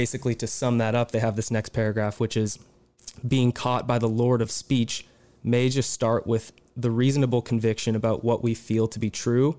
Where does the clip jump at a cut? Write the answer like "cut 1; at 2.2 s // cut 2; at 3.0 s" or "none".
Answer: none